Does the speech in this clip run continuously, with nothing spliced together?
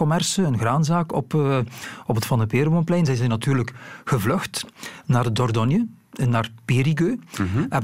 yes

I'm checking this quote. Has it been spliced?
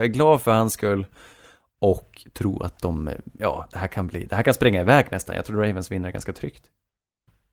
no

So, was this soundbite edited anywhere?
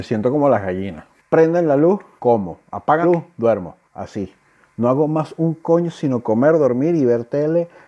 yes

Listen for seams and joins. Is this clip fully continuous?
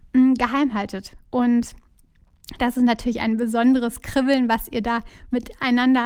yes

